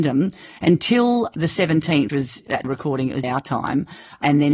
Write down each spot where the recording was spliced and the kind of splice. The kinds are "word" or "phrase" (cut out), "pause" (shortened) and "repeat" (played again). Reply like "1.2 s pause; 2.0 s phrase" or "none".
2.1 s word; 2.6 s word; 3.2 s word